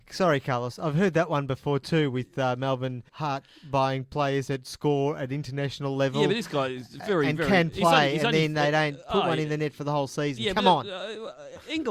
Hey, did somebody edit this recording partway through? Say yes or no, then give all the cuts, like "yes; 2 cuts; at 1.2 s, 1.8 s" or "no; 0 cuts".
yes; 1 cut; at 3.1 s